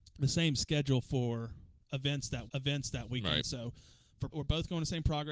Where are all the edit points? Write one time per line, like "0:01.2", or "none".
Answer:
0:02.5
0:04.3